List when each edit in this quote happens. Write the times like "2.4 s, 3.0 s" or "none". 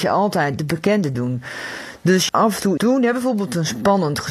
1.1 s, 2.3 s, 2.8 s